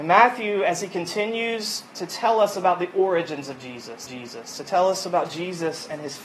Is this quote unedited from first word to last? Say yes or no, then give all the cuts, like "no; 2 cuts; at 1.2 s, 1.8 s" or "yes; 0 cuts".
no; 1 cut; at 4.1 s